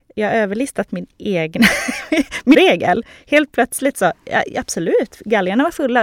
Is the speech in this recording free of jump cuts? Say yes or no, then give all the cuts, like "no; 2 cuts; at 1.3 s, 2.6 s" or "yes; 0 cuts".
no; 1 cut; at 2.5 s